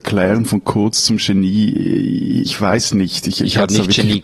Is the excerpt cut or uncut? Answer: cut